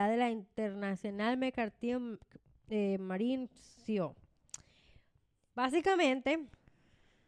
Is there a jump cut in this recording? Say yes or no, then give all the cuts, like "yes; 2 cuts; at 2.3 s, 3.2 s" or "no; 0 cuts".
no; 0 cuts